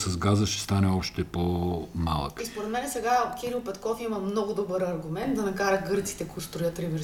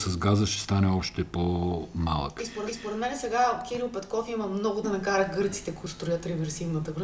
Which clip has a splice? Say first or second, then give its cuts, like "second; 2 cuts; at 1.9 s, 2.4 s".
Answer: second; 2 cuts; at 2.7 s, 4.8 s